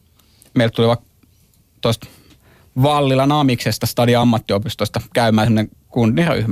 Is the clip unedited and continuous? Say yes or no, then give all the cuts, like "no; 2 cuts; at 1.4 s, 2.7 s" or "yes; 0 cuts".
yes; 0 cuts